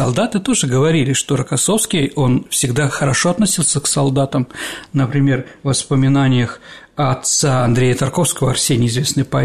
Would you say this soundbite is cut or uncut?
uncut